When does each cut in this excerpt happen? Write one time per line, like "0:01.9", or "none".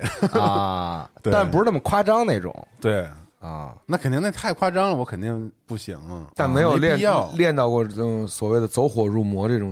0:03.8
0:05.6